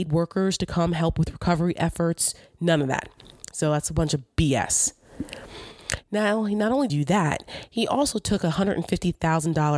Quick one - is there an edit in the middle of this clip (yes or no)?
yes